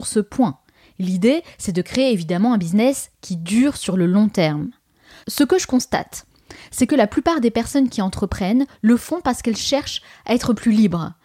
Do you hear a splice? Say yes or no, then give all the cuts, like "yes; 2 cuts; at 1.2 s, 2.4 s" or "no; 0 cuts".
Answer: no; 0 cuts